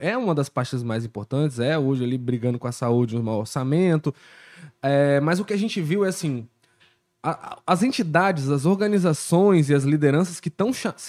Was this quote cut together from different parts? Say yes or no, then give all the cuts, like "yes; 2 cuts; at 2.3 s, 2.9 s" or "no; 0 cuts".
no; 0 cuts